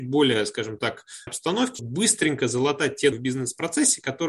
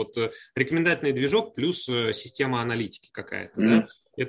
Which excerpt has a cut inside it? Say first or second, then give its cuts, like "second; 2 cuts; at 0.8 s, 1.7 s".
first; 3 cuts; at 1.3 s, 1.8 s, 3.1 s